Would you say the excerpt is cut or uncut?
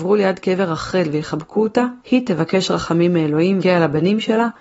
cut